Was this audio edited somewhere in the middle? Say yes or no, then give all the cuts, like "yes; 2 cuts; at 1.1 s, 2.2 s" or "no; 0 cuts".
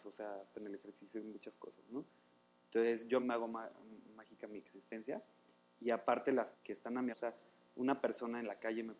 yes; 3 cuts; at 3.2 s, 6.5 s, 7.1 s